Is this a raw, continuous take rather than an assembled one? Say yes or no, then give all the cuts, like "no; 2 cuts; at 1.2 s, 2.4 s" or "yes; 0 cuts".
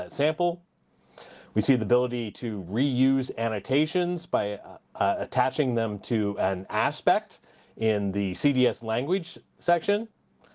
yes; 0 cuts